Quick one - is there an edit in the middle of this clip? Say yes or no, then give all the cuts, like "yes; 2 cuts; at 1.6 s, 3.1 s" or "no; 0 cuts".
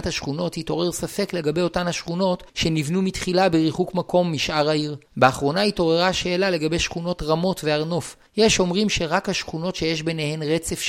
yes; 3 cuts; at 2.5 s, 5.1 s, 8.3 s